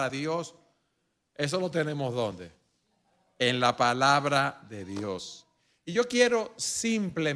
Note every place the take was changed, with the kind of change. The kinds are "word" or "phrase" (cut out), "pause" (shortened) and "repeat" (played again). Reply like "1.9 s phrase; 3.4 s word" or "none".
none